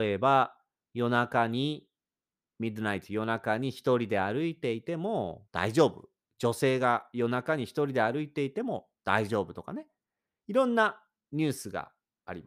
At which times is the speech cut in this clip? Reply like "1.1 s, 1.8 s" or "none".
5.5 s

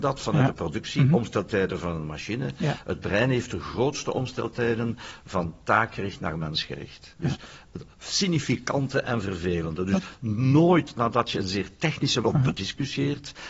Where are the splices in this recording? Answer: 7.9 s, 12.2 s

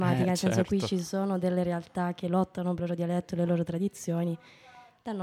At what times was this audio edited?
2.8 s

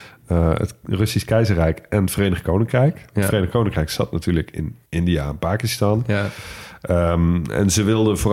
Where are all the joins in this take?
4.9 s

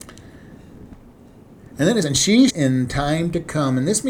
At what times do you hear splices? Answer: 2.0 s, 2.5 s

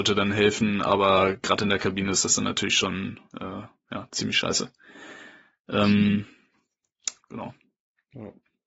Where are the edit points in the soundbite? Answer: 7.2 s

